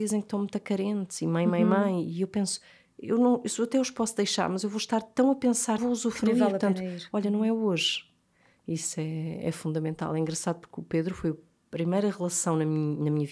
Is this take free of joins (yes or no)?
no